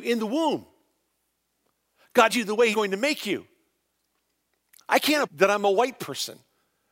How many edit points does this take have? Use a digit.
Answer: 3